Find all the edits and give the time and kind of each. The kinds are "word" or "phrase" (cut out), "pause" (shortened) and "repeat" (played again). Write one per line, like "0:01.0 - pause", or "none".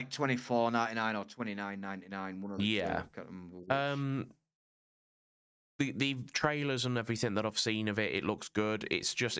none